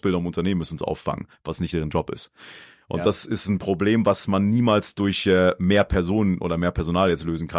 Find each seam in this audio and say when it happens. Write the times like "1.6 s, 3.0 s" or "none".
none